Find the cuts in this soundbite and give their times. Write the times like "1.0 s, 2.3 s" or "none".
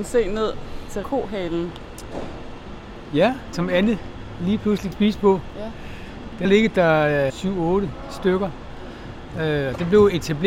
1.0 s, 3.5 s, 4.9 s, 6.4 s, 7.3 s